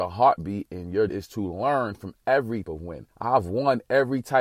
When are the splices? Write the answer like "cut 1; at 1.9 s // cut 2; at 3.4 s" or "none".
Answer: cut 1; at 1.1 s // cut 2; at 2.6 s // cut 3; at 3.1 s